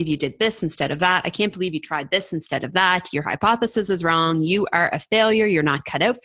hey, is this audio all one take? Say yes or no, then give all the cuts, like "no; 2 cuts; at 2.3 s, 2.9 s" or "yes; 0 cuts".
yes; 0 cuts